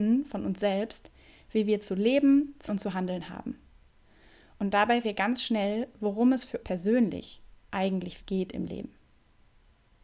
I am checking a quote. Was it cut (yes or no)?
yes